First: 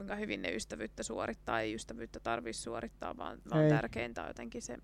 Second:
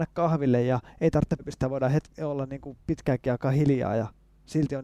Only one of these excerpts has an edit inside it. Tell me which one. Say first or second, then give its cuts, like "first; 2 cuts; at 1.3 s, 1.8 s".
second; 1 cut; at 1.4 s